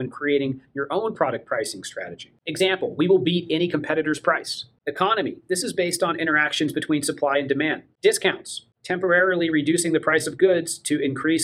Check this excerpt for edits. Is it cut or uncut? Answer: uncut